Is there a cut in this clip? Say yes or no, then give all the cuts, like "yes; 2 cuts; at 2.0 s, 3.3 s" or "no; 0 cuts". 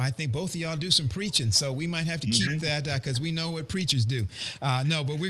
no; 0 cuts